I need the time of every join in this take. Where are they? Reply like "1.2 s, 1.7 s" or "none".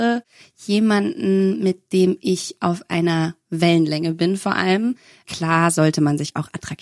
none